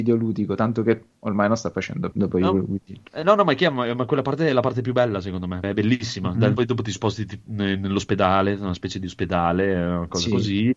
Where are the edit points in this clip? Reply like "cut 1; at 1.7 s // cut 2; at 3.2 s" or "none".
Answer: cut 1; at 2.1 s // cut 2; at 3.1 s // cut 3; at 5.6 s // cut 4; at 6.6 s